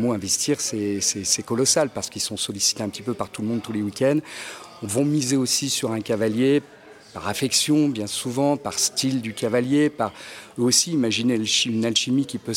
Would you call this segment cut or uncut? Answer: uncut